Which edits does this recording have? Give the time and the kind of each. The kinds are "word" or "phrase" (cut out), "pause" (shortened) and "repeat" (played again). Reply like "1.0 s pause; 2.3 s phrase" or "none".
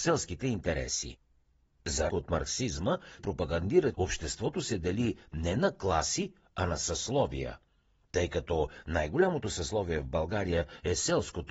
2.1 s word; 3.2 s word; 3.9 s word